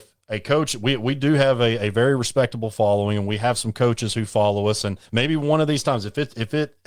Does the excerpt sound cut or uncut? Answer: cut